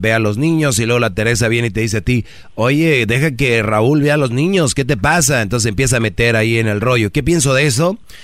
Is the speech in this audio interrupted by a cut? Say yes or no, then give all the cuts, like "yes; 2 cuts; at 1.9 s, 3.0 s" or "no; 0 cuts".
no; 0 cuts